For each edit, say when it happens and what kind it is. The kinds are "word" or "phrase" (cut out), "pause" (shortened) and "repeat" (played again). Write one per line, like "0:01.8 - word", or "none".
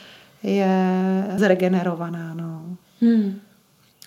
0:01.4 - word